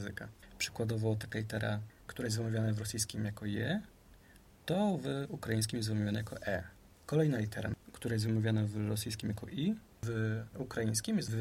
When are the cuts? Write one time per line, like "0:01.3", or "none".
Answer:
0:06.9